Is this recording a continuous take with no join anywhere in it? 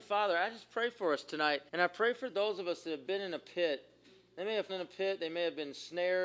no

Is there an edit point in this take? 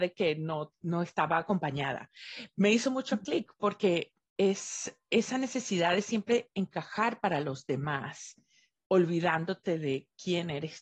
no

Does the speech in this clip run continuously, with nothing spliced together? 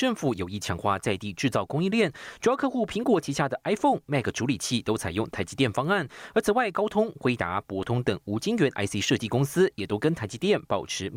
yes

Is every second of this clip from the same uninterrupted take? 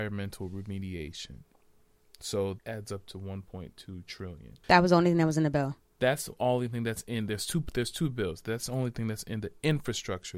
no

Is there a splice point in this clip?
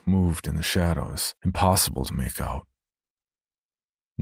yes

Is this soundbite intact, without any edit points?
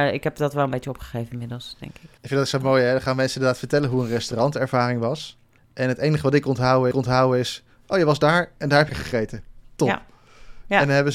no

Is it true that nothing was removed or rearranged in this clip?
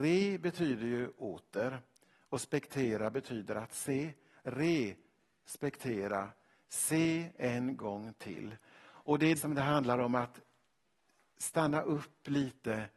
no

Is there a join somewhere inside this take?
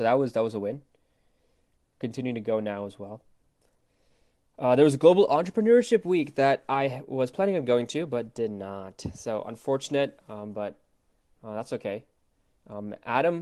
no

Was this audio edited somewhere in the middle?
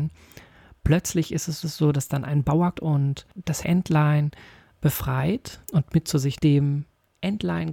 yes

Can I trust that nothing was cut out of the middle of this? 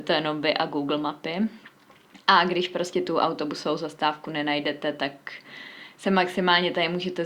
yes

